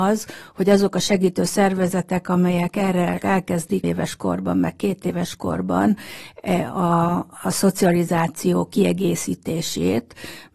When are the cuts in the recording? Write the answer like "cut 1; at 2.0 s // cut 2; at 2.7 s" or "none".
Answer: cut 1; at 3.2 s // cut 2; at 3.8 s